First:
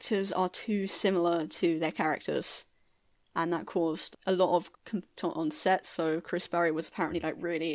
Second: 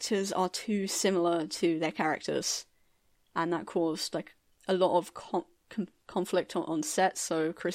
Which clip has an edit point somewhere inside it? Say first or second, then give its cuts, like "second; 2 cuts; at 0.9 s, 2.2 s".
first; 3 cuts; at 4.1 s, 4.7 s, 5.2 s